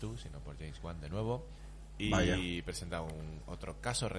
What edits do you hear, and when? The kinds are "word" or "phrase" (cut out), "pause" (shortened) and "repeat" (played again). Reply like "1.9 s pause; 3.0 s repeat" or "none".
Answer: 1.6 s pause